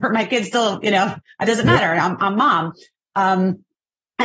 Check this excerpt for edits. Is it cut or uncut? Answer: uncut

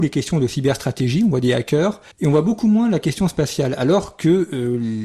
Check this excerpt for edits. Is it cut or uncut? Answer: cut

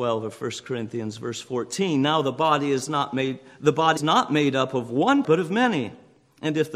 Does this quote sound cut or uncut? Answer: cut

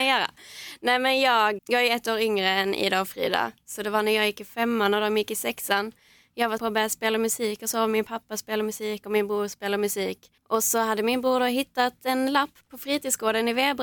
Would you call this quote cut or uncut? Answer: cut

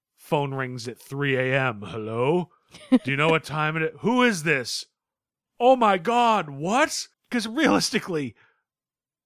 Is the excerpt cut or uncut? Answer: cut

